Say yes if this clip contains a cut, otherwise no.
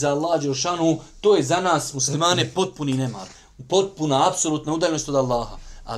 no